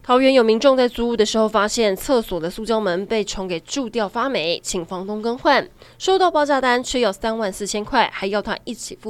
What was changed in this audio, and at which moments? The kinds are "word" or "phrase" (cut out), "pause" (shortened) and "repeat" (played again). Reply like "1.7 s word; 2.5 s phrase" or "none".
none